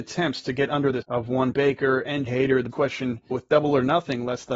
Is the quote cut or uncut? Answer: cut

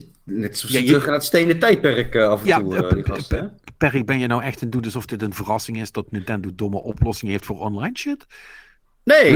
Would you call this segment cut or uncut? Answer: uncut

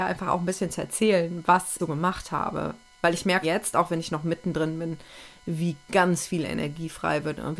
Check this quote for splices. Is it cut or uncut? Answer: cut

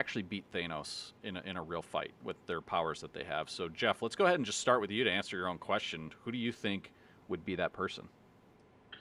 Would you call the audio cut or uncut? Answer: uncut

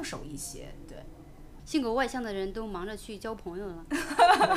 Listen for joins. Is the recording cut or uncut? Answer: cut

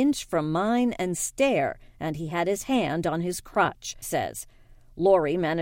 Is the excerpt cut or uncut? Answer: cut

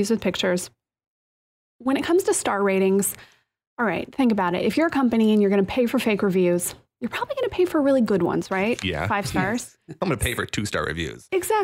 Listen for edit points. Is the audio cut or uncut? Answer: uncut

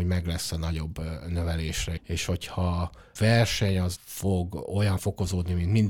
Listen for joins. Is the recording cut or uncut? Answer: cut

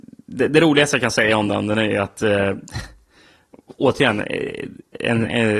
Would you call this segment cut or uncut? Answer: uncut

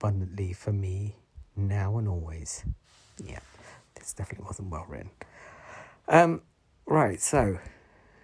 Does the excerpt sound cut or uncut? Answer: uncut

